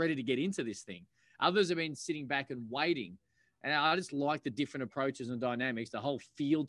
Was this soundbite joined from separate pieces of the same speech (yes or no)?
no